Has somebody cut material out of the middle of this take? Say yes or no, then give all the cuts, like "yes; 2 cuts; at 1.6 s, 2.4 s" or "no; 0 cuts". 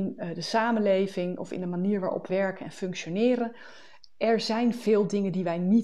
yes; 1 cut; at 2.3 s